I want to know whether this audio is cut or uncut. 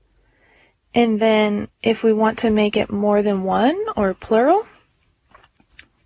cut